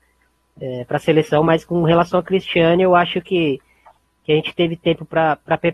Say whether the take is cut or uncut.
uncut